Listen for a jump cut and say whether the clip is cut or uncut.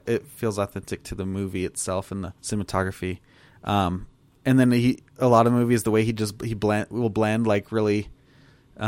cut